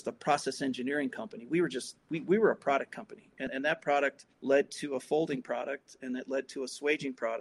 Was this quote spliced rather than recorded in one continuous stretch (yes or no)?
yes